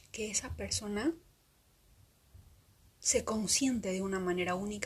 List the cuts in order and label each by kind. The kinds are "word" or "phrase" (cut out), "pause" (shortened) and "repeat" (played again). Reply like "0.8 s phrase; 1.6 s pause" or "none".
none

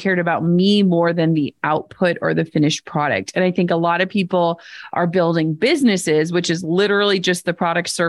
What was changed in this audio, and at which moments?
none

